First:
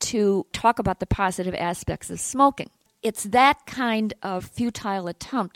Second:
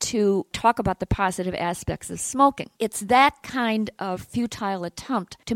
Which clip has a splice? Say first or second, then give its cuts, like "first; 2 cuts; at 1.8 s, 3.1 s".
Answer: second; 1 cut; at 2.7 s